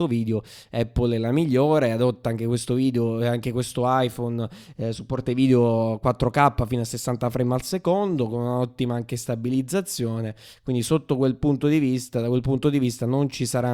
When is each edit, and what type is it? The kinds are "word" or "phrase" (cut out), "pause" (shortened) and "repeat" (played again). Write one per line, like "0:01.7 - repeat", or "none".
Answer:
none